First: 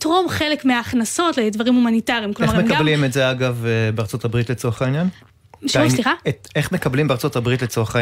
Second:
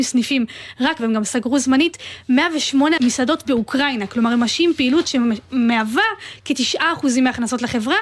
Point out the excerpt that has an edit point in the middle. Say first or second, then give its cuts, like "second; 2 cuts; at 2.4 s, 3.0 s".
second; 2 cuts; at 1.0 s, 3.0 s